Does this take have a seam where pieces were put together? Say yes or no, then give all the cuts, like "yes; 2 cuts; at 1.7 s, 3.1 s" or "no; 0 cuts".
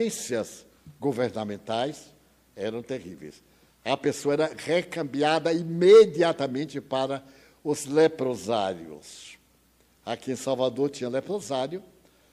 no; 0 cuts